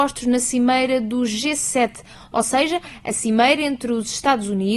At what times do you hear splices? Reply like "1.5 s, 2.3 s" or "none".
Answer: none